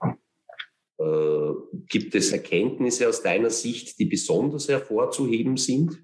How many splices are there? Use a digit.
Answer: 0